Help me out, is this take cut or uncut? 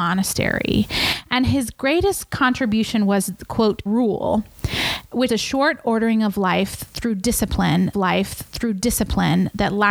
cut